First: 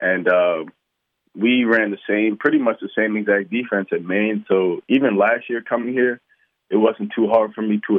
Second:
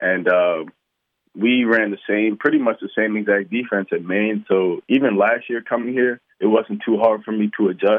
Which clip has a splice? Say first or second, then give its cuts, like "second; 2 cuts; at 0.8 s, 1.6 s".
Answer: second; 1 cut; at 6.3 s